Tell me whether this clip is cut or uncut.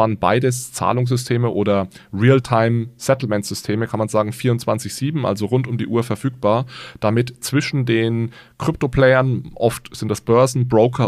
uncut